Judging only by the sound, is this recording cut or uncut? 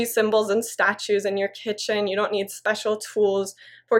uncut